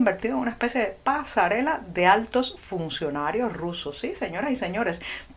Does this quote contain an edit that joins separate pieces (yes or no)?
no